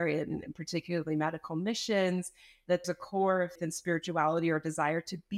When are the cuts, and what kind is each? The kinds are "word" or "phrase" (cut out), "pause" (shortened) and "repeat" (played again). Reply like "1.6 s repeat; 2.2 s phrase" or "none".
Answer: 2.8 s word; 3.6 s word